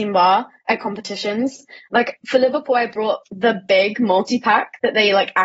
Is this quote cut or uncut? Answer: uncut